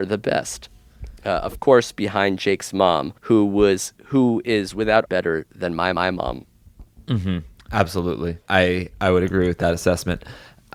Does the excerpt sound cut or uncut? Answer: cut